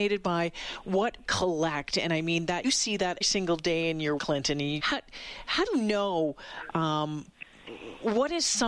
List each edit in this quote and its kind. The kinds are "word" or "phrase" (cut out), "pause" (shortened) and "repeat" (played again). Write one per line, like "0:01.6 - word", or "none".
0:01.2 - word
0:02.6 - word
0:03.2 - word
0:04.2 - word
0:04.8 - word
0:05.7 - word